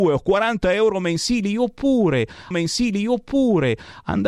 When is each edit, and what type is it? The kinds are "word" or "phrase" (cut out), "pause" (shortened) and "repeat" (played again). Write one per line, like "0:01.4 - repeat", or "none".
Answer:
0:02.5 - repeat